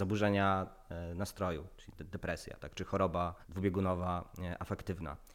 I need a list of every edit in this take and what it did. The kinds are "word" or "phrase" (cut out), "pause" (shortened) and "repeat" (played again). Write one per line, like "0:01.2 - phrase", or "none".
0:02.6 - word
0:03.4 - pause